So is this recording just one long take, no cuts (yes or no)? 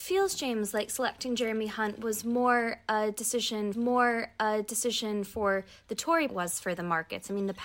no